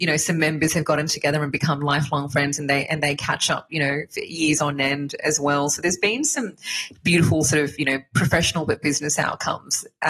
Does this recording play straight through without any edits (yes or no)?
yes